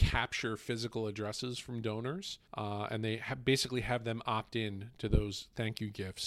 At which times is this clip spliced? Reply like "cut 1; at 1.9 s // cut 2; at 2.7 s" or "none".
cut 1; at 2.5 s